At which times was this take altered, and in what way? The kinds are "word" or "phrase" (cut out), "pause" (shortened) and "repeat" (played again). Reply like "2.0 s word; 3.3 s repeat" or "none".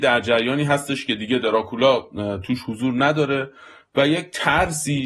none